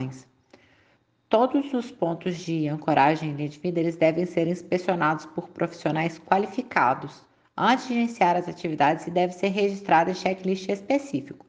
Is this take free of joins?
yes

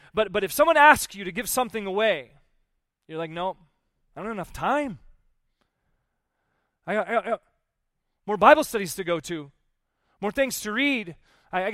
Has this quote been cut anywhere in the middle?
no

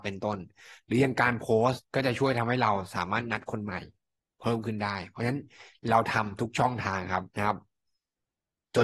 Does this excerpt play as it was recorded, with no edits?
no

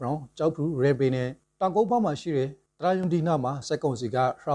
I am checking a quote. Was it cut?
no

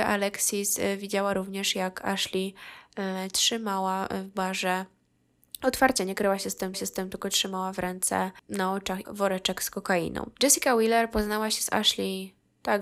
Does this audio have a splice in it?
yes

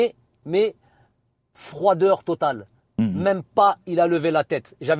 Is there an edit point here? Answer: no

